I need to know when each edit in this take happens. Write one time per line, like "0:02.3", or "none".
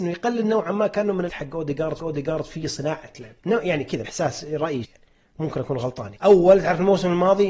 0:01.3
0:02.0
0:03.4
0:04.0
0:04.8
0:06.2